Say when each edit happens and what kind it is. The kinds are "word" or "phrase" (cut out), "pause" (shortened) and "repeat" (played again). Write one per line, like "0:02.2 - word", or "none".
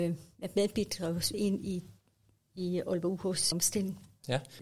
0:01.3 - word
0:03.5 - phrase